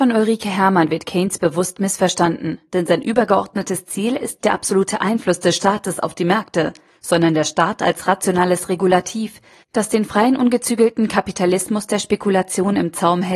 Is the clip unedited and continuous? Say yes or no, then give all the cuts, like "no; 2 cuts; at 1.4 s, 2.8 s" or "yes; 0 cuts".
no; 1 cut; at 4.4 s